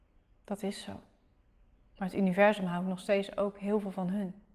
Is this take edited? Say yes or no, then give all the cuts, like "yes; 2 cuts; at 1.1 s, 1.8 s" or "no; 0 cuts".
no; 0 cuts